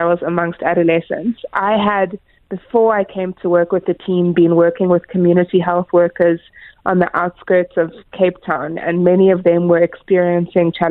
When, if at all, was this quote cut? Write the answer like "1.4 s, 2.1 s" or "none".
none